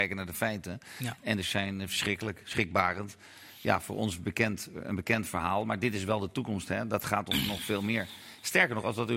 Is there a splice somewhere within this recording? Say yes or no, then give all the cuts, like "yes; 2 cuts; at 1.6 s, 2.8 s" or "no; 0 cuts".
yes; 1 cut; at 1.4 s